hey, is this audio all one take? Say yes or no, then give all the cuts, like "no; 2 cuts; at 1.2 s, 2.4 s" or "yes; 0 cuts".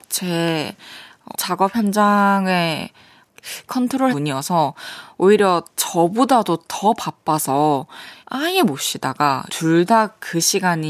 no; 6 cuts; at 1.3 s, 3.7 s, 4.1 s, 5.7 s, 8.2 s, 9.5 s